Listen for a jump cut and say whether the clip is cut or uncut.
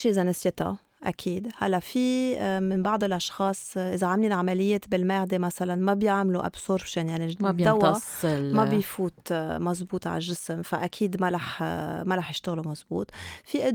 uncut